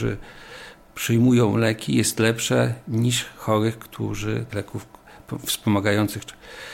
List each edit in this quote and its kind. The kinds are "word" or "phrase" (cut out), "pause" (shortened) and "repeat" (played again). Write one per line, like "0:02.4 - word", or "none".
0:04.5 - word